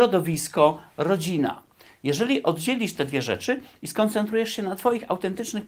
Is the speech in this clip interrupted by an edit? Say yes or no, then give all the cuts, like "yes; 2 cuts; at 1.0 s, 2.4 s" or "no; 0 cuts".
no; 0 cuts